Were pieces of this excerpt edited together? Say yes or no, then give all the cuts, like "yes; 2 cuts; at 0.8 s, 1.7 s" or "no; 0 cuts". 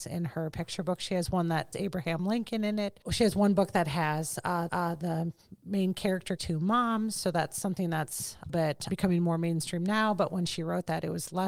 yes; 5 cuts; at 1.7 s, 4.7 s, 6.4 s, 8.5 s, 8.9 s